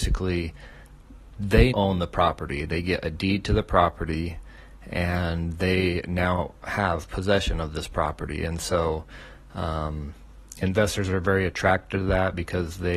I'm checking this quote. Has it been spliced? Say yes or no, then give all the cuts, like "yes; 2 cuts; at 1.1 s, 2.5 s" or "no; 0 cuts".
yes; 1 cut; at 1.7 s